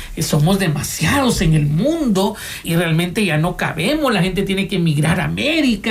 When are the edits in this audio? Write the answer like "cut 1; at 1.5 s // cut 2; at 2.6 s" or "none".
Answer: cut 1; at 2.6 s